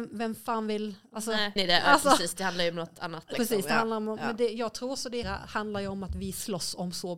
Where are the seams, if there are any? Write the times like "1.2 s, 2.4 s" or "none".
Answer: 1.6 s, 3.3 s, 5.2 s